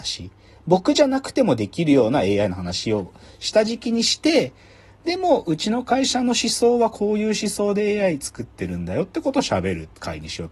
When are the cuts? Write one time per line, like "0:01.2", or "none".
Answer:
none